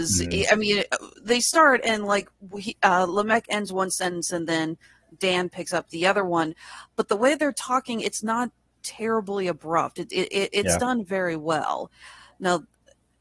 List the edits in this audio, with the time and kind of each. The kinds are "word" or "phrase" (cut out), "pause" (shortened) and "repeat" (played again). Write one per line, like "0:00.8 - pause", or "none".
none